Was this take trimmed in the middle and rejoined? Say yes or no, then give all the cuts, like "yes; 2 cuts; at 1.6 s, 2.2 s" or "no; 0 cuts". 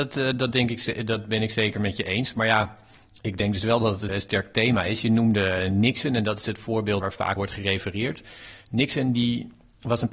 yes; 3 cuts; at 4.1 s, 7.0 s, 7.4 s